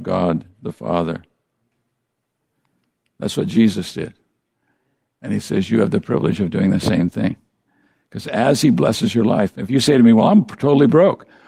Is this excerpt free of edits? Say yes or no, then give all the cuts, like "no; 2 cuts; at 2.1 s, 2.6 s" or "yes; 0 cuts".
yes; 0 cuts